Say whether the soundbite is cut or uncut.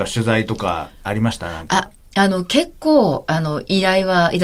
cut